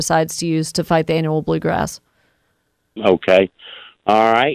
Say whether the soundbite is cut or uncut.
uncut